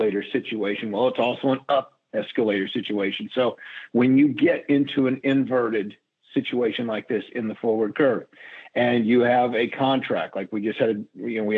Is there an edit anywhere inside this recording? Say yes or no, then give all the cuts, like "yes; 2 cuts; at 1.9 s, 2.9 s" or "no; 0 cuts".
no; 0 cuts